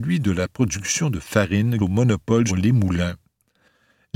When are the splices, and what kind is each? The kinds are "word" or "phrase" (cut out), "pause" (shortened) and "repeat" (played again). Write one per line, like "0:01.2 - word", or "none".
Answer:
0:01.8 - word
0:02.5 - word